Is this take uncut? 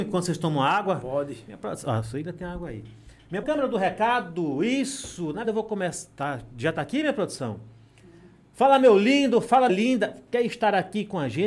no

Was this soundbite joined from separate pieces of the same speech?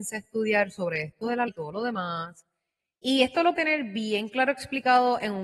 yes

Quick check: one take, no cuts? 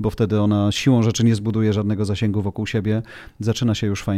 yes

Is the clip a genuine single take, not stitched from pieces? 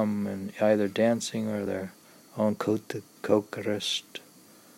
yes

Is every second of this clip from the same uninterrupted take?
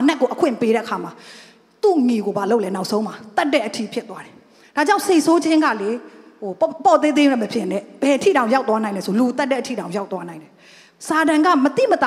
yes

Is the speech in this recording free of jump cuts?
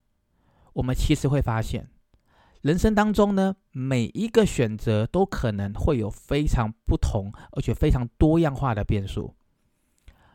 yes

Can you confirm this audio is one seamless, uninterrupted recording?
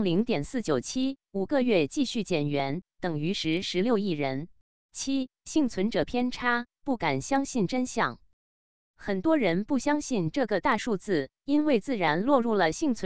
no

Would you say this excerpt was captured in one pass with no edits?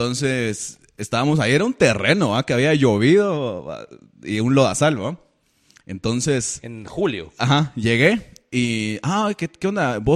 yes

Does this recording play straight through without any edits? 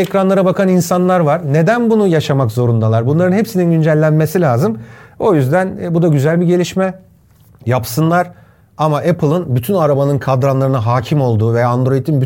yes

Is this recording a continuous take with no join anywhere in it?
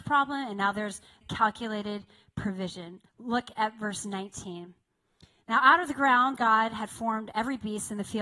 no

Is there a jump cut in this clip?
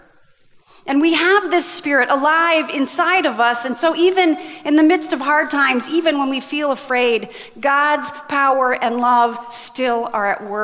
no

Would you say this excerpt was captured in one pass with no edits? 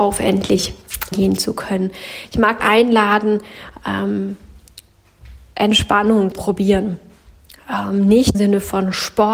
no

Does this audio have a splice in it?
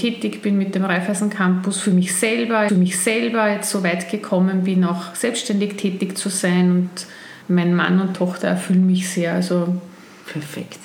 yes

